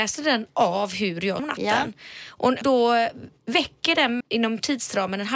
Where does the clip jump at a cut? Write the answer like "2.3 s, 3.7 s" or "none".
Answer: 1.4 s, 2.6 s, 4.2 s